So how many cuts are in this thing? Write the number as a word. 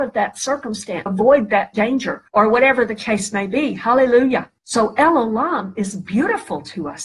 three